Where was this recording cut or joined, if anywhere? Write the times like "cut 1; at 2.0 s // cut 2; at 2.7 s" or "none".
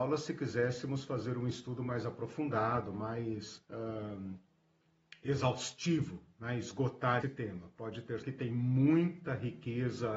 cut 1; at 3.6 s // cut 2; at 7.2 s // cut 3; at 8.2 s